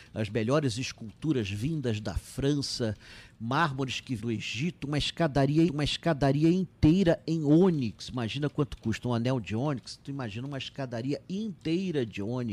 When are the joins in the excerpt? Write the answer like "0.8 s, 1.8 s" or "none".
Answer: 4.2 s, 5.7 s